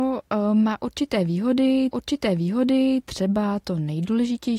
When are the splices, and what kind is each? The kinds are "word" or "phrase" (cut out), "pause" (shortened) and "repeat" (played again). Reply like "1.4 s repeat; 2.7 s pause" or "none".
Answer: 1.9 s repeat